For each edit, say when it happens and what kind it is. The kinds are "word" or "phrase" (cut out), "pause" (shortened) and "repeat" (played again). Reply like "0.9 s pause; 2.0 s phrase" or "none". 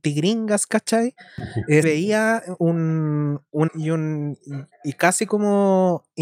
1.8 s word; 2.6 s word; 3.7 s word